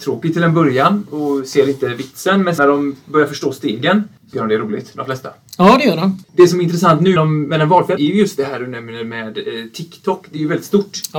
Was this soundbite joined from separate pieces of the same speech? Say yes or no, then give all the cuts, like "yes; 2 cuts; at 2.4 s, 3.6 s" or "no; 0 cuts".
yes; 4 cuts; at 2.6 s, 4.3 s, 7.2 s, 8.0 s